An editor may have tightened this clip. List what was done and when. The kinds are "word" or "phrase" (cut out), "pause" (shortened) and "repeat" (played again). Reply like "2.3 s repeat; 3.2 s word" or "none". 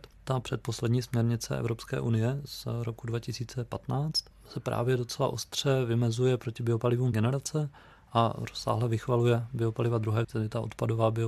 7.1 s word; 10.2 s word